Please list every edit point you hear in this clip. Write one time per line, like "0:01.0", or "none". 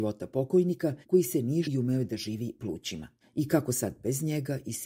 0:01.0
0:01.6
0:02.6
0:03.2

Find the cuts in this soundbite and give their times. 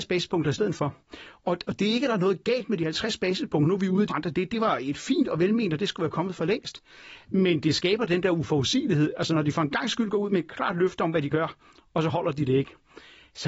0:04.1

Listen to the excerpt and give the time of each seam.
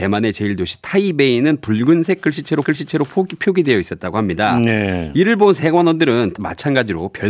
0:02.6
0:06.4

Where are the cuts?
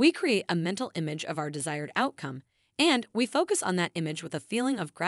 none

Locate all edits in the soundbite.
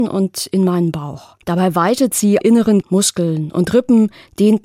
0:01.4
0:02.4
0:02.8

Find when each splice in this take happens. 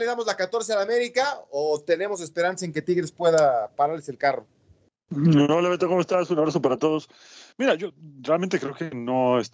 none

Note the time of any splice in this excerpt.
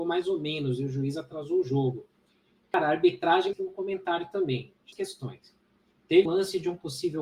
0:03.5
0:04.9
0:06.3

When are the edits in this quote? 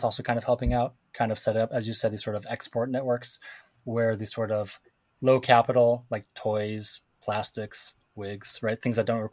none

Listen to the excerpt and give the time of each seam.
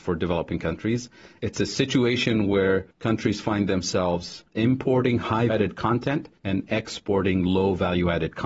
0:01.4
0:02.9
0:04.5
0:05.5
0:06.4

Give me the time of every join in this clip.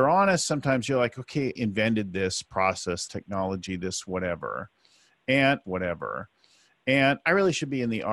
0:01.6
0:03.1
0:05.6

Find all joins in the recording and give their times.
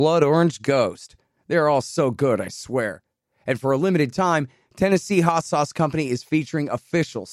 none

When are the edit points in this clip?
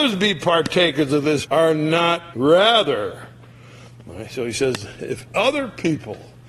0:01.4
0:02.3

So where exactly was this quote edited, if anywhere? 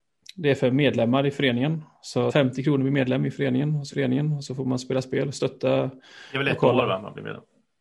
0:02.3
0:03.9

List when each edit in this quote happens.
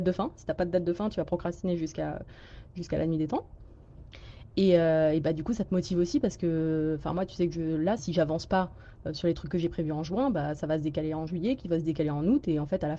0:08.0

